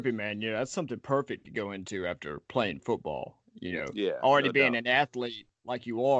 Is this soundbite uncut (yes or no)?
yes